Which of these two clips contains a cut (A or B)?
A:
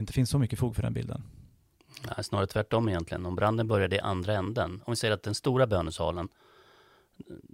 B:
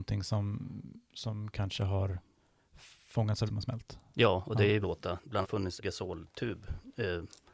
B